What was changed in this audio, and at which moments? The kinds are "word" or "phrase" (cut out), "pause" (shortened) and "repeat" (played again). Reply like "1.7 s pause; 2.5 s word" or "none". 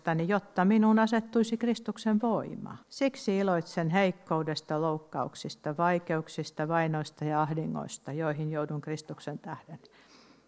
2.8 s pause